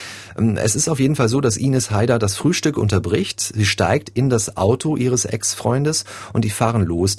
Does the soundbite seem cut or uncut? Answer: uncut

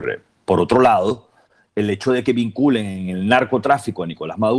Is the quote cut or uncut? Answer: uncut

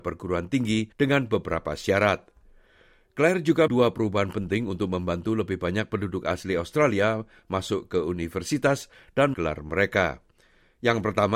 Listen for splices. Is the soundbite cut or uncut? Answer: cut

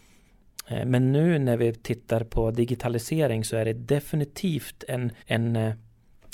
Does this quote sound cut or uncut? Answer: cut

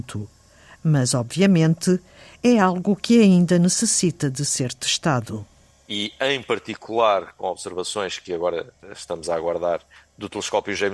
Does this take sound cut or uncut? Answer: uncut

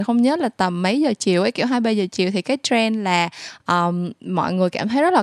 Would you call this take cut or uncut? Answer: uncut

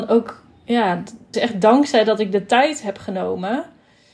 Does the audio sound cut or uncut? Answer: cut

